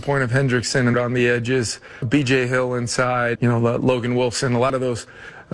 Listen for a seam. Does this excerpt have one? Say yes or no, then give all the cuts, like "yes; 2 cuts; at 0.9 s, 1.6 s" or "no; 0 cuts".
yes; 3 cuts; at 0.9 s, 2.0 s, 3.4 s